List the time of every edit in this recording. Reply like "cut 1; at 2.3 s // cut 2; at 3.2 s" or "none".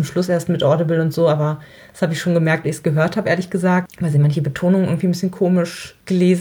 cut 1; at 2.6 s